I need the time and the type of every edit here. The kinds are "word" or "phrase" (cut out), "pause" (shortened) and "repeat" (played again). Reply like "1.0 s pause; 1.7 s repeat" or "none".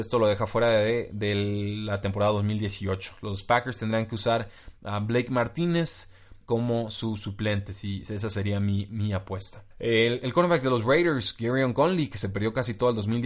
6.4 s pause; 9.7 s pause